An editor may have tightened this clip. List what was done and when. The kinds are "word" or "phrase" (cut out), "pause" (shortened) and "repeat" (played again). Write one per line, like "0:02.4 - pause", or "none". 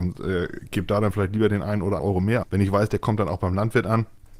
0:02.0 - word
0:02.4 - word